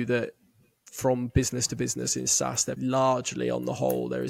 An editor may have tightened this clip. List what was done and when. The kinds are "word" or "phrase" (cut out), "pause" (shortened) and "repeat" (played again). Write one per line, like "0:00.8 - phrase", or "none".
0:02.8 - word